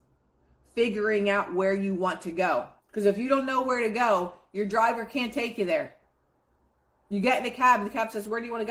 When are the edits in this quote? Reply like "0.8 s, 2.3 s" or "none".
2.8 s